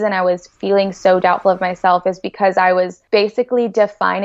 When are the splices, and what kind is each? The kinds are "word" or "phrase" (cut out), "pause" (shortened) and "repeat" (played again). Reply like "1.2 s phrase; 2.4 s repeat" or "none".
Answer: 3.1 s pause